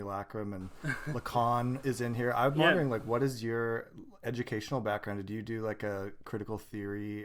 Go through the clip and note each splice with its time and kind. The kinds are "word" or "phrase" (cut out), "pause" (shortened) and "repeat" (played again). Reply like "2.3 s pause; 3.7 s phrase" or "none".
none